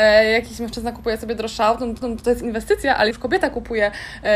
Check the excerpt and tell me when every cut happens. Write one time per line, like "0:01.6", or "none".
0:02.0
0:03.1